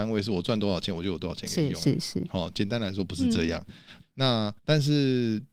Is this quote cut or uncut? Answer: cut